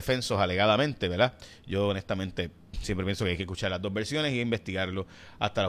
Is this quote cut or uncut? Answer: uncut